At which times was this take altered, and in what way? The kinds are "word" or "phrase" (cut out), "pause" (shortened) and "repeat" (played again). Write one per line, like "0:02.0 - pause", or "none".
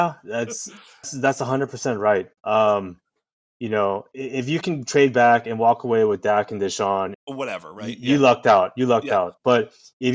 0:01.0 - word
0:02.4 - pause
0:04.6 - phrase
0:07.1 - phrase